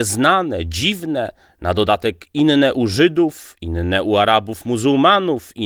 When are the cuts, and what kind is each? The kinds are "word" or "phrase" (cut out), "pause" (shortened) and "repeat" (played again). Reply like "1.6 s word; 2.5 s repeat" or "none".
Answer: none